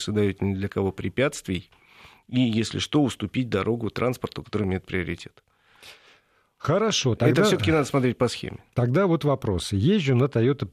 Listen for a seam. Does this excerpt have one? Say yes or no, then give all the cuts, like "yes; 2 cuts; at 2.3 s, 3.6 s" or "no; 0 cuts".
no; 0 cuts